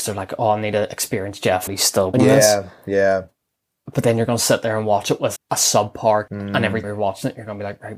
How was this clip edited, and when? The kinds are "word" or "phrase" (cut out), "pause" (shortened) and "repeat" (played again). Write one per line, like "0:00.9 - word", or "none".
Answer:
0:01.7 - word
0:02.1 - word
0:05.4 - word
0:06.3 - word
0:06.8 - word